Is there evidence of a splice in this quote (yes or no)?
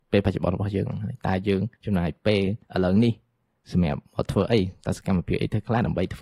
yes